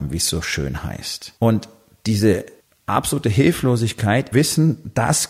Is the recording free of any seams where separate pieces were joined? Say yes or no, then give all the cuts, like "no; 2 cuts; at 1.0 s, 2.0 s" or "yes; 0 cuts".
no; 3 cuts; at 1.4 s, 2.6 s, 4.3 s